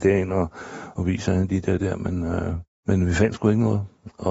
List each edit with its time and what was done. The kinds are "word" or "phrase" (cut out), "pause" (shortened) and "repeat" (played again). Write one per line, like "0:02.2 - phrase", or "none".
0:01.8 - word